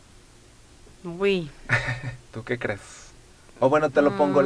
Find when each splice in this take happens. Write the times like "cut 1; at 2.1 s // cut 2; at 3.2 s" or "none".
cut 1; at 2.3 s // cut 2; at 3.3 s